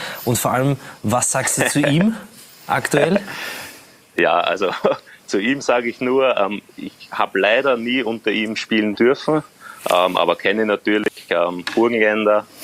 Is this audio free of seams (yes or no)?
yes